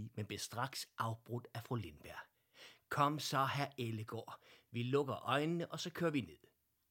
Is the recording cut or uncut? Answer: uncut